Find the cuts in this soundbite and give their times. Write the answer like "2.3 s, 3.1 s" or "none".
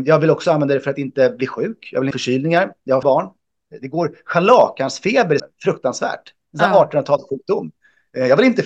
2.1 s, 3.0 s, 5.4 s

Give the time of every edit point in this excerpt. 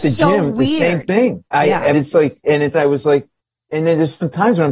1.5 s, 1.9 s, 2.7 s

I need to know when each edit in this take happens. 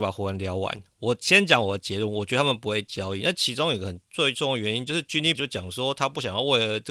5.3 s

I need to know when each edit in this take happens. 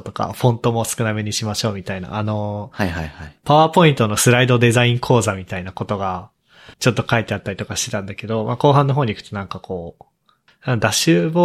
6.7 s

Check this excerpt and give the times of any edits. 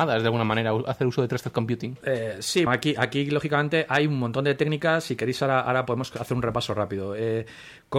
2.7 s

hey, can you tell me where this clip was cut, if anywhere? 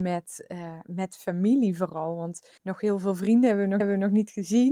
2.6 s, 3.8 s

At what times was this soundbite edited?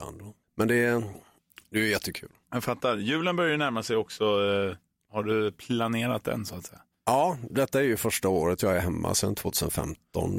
none

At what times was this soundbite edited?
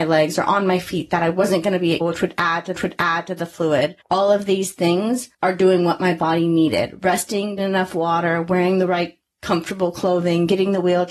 2.0 s, 2.8 s, 4.0 s, 5.3 s, 7.6 s

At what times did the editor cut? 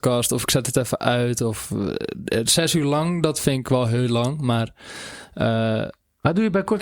none

